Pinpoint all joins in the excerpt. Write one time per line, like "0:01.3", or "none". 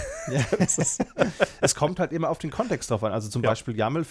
none

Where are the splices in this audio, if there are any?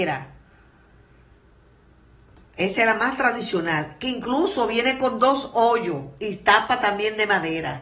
none

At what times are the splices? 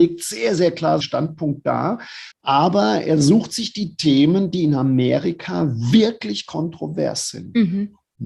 0:01.0
0:02.3

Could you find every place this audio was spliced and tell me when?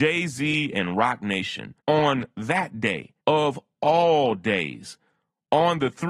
0:01.8
0:03.2

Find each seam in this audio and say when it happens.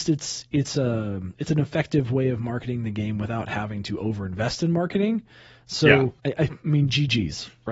0:06.2

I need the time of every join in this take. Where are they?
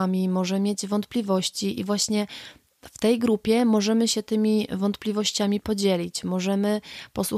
none

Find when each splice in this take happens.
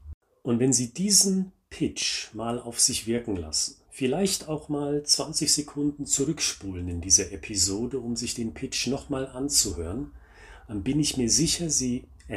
0:03.8

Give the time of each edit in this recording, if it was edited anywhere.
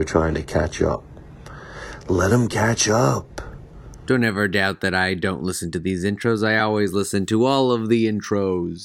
none

